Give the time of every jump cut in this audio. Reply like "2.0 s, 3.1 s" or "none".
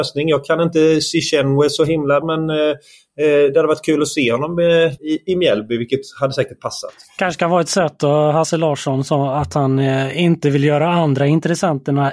2.2 s, 5.0 s